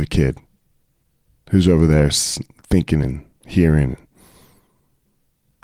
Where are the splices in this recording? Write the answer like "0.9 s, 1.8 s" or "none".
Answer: none